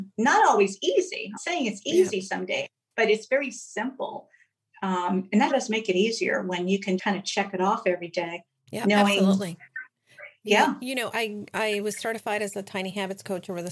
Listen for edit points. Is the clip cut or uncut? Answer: cut